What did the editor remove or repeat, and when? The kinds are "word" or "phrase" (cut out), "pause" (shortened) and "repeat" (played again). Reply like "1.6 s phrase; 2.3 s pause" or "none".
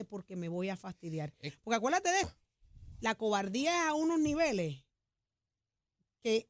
2.2 s word